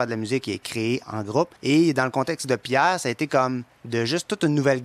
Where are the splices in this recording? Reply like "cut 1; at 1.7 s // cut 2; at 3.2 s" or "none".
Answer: cut 1; at 1.0 s // cut 2; at 1.6 s // cut 3; at 3.7 s